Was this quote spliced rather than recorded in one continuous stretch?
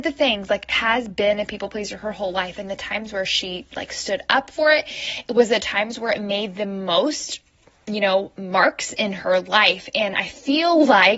no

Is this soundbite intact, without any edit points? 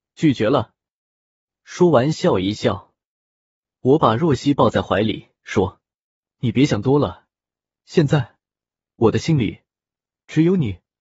yes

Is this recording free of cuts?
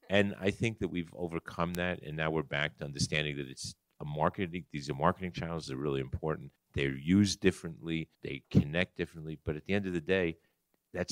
no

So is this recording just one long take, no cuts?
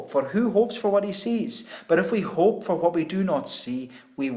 yes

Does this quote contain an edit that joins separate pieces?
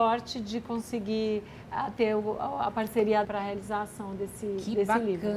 yes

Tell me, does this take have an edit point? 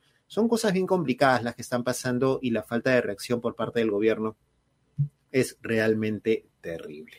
no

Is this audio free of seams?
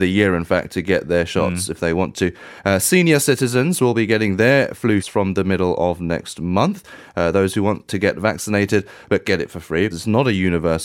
no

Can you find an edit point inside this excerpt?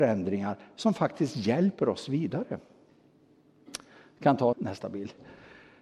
yes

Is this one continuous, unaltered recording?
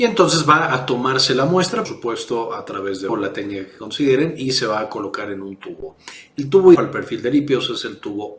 no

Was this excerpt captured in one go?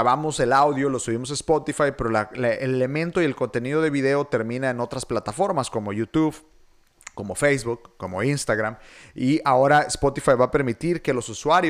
yes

